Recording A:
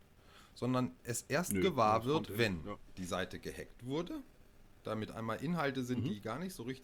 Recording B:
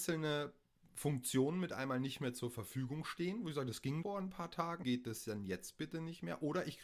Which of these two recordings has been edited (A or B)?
B